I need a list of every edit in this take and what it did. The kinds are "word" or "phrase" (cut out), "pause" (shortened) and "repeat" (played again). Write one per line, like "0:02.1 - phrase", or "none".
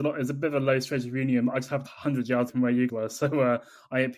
0:01.9 - phrase
0:02.5 - word
0:02.9 - word

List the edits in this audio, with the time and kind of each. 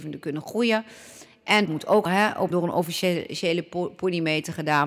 0:01.7 - word
0:02.1 - word
0:02.5 - word

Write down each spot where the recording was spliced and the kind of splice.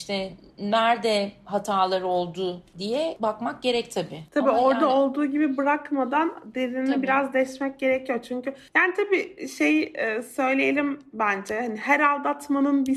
none

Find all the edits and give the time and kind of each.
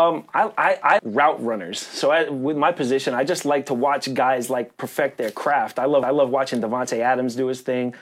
0:01.0 - word
0:06.0 - repeat

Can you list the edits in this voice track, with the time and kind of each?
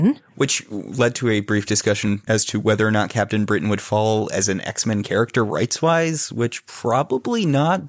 none

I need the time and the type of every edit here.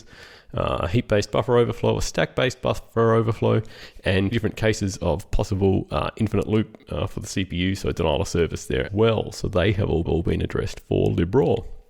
0:04.3 - word
0:08.9 - word
0:10.1 - repeat

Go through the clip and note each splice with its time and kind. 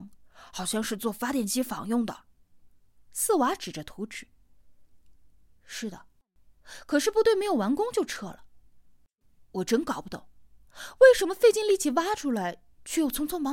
none

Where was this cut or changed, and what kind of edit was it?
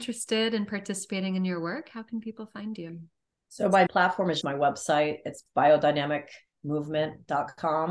0:03.3 - pause
0:03.9 - word
0:04.4 - word

